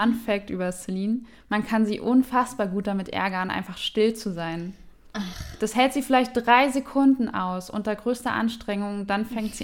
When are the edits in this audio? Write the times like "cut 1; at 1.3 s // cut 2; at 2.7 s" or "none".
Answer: none